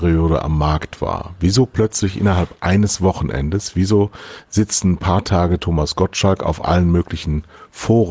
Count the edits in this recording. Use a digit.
0